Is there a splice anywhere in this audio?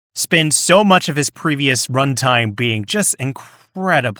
no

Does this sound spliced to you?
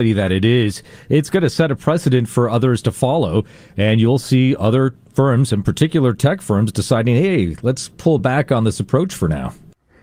no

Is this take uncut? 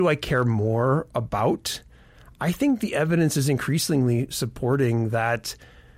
yes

